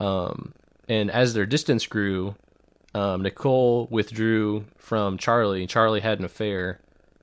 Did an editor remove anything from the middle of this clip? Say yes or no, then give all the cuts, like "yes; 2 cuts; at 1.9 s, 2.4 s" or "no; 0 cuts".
no; 0 cuts